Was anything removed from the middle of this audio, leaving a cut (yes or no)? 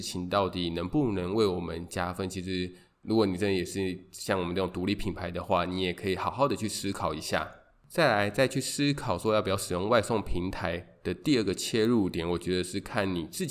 no